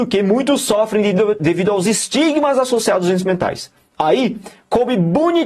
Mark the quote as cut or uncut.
uncut